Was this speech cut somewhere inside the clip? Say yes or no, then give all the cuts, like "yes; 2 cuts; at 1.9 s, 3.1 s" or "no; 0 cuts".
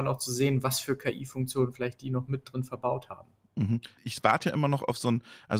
no; 0 cuts